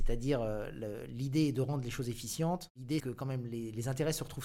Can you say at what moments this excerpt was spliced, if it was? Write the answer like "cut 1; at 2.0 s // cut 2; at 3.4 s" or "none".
cut 1; at 3.0 s